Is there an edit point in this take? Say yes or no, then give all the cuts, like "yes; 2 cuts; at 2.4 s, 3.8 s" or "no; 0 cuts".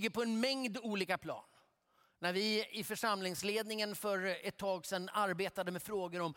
no; 0 cuts